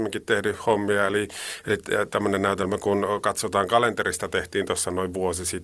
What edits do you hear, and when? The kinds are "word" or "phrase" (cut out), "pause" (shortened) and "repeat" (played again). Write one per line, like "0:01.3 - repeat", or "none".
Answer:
none

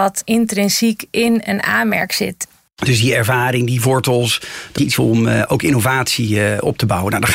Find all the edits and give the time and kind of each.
0:04.8 - word

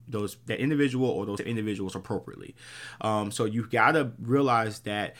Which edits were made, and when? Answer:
0:01.4 - word

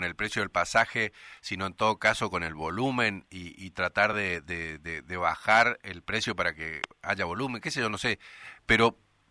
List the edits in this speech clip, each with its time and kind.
none

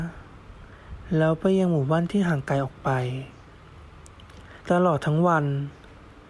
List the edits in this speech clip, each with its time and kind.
0:04.6 - pause

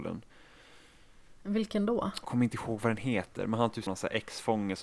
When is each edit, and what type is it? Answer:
0:02.2 - word
0:03.9 - word

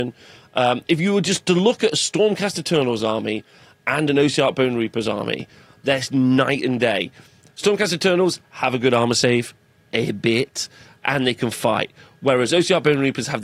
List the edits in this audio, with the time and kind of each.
none

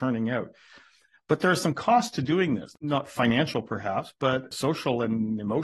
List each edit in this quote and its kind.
none

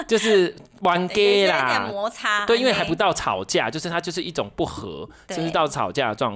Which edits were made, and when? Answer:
none

